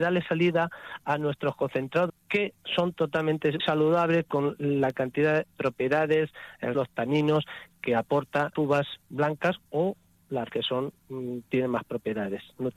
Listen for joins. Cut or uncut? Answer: cut